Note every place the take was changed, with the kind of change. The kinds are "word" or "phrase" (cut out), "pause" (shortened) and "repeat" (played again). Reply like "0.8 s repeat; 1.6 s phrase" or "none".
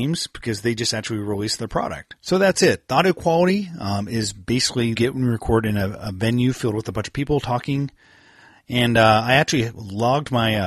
2.2 s pause; 4.9 s phrase